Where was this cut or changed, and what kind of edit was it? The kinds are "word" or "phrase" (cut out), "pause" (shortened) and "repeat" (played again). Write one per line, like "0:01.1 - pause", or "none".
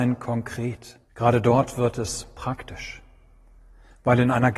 0:01.1 - pause